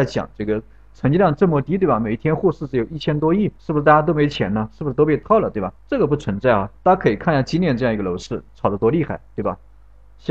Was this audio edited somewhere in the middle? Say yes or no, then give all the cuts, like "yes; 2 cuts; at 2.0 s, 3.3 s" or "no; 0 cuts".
yes; 3 cuts; at 3.6 s, 5.8 s, 6.8 s